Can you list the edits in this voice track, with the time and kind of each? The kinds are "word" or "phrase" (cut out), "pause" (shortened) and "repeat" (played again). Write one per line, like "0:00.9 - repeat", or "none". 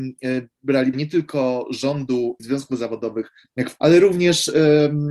0:00.9 - word
0:02.4 - word
0:03.8 - word